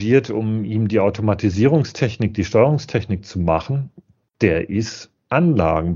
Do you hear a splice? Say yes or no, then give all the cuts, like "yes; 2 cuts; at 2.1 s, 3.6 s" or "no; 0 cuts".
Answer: no; 0 cuts